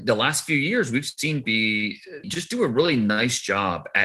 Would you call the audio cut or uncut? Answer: cut